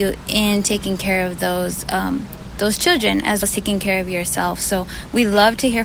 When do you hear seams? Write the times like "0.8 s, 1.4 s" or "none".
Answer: 3.4 s